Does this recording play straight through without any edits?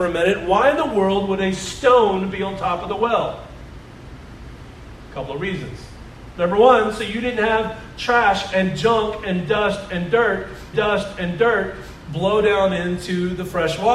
no; 1 cut; at 10.7 s

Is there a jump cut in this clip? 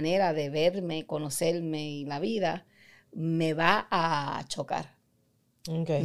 no; 0 cuts

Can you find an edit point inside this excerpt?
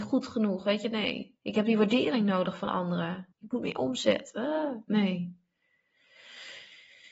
yes; 2 cuts; at 1.4 s, 3.3 s

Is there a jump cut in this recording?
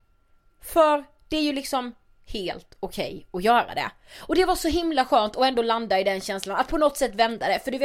no; 0 cuts

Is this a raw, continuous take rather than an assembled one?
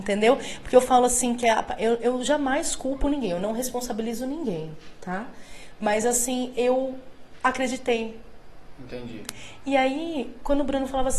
yes; 0 cuts

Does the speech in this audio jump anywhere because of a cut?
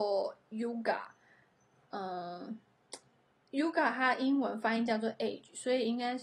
no; 0 cuts

